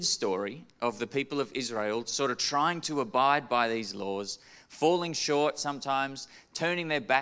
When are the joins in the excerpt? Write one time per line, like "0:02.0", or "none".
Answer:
none